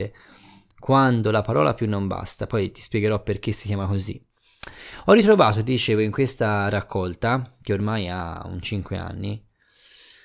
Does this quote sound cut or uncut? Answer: uncut